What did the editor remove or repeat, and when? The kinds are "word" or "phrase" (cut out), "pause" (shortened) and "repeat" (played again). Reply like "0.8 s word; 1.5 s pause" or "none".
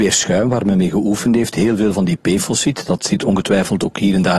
none